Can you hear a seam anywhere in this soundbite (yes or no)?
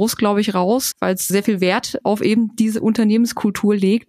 yes